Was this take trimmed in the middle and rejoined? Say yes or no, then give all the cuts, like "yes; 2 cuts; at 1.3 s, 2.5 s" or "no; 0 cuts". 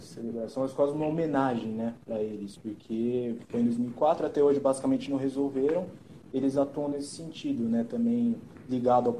no; 0 cuts